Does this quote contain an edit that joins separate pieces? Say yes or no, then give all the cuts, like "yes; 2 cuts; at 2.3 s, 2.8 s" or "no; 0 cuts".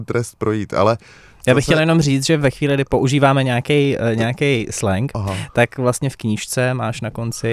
no; 0 cuts